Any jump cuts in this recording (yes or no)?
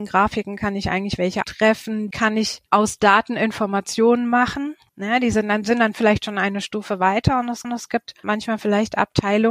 yes